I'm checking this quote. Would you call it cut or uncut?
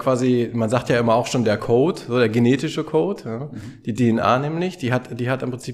uncut